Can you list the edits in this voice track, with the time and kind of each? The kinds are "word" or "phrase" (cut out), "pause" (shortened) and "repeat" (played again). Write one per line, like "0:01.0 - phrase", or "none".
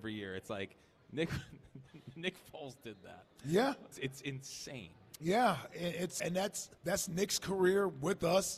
0:03.9 - word
0:06.2 - word
0:06.8 - pause